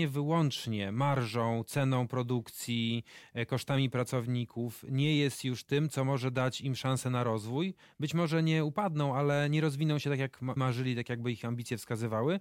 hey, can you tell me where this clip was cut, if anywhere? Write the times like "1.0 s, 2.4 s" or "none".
10.6 s